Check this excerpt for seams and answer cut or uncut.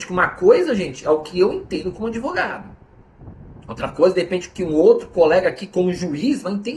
uncut